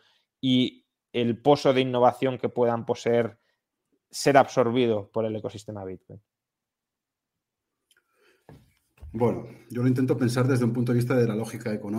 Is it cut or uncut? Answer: cut